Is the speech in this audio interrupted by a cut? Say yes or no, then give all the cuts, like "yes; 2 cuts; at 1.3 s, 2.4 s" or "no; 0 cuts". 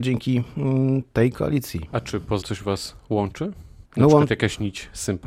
yes; 2 cuts; at 2.4 s, 3.9 s